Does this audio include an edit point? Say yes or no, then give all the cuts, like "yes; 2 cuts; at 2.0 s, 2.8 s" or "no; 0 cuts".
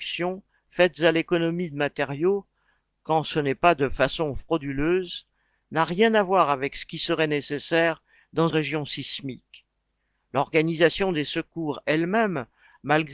yes; 1 cut; at 8.5 s